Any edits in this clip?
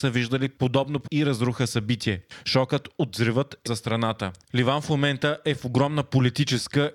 yes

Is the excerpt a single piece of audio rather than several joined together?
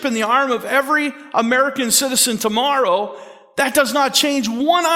yes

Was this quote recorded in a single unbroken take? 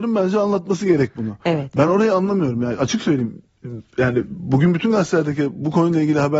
yes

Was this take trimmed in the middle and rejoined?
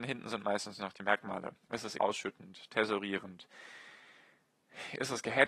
yes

